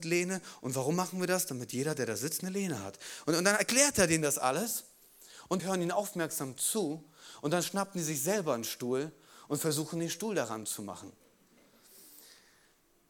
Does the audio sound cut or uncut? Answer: cut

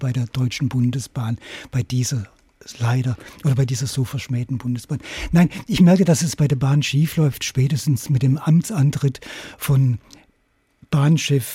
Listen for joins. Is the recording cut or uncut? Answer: uncut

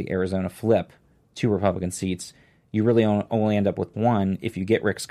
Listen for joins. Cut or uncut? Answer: cut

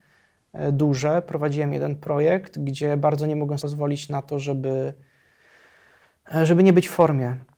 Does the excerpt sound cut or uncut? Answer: cut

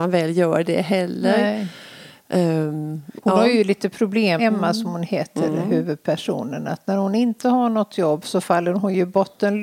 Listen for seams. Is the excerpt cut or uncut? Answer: cut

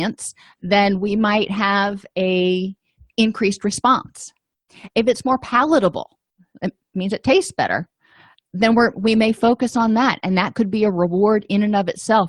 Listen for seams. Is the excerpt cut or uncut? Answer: uncut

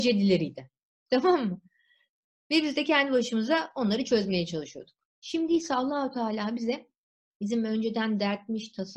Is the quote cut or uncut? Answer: uncut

